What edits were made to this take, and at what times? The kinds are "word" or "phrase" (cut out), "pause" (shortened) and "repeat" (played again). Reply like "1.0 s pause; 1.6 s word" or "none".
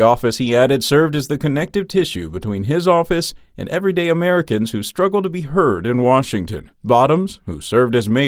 6.7 s pause